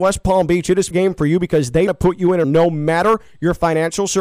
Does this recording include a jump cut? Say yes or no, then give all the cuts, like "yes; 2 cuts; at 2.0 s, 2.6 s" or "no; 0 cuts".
yes; 3 cuts; at 0.9 s, 1.9 s, 2.4 s